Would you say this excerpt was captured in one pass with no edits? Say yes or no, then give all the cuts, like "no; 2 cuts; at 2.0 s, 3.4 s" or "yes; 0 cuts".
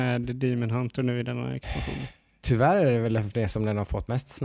yes; 0 cuts